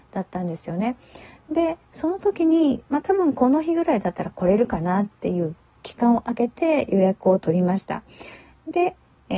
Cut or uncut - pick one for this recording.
uncut